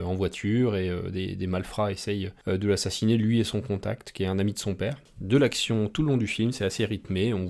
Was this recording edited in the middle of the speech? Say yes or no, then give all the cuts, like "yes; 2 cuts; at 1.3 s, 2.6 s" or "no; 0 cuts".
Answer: no; 0 cuts